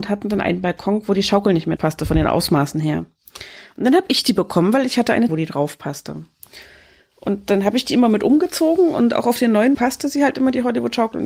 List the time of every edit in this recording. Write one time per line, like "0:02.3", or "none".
0:01.8
0:05.3
0:09.7